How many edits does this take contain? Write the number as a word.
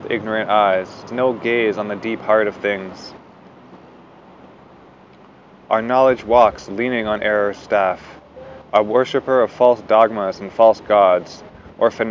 one